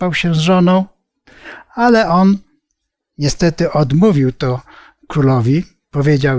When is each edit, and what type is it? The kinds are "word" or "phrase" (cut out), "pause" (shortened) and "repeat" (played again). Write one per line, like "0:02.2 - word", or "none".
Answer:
none